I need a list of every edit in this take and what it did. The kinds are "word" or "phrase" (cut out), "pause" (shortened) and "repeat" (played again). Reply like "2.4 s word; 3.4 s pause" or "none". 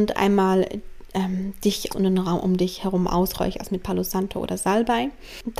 1.9 s word